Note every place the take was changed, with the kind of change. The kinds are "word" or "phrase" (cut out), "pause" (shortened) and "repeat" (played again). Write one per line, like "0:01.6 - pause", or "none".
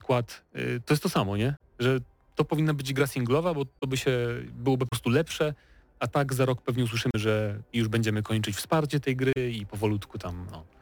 none